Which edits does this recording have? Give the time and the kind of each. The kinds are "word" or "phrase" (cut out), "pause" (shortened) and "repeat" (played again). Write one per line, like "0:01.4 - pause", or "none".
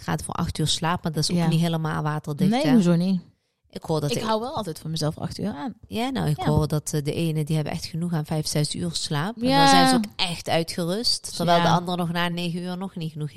none